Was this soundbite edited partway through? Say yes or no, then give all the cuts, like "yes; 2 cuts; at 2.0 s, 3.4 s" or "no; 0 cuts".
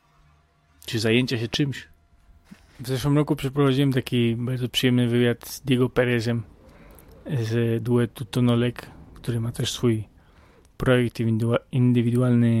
no; 0 cuts